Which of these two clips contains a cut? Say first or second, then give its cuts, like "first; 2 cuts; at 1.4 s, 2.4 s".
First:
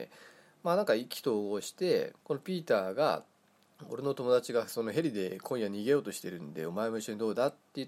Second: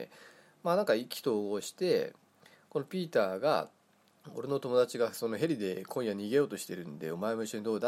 first; 1 cut; at 2.2 s